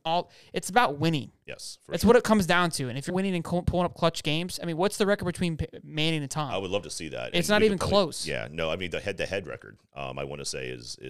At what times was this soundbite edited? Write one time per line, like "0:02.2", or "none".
0:03.1